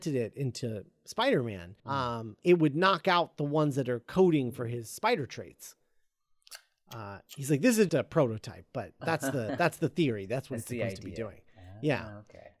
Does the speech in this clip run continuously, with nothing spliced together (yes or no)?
no